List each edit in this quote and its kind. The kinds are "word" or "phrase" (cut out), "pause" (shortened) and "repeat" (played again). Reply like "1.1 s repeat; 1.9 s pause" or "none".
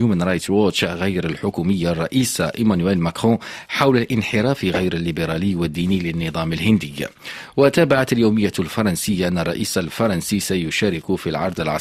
none